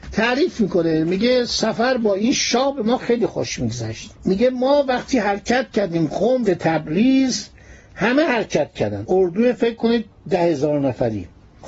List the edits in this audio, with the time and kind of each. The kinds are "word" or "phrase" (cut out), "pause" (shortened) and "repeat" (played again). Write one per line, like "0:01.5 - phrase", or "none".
0:04.1 - pause
0:06.4 - phrase
0:09.0 - word